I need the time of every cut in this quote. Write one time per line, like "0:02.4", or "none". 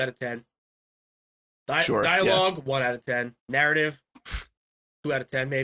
0:03.4